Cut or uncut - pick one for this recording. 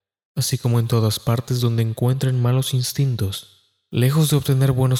uncut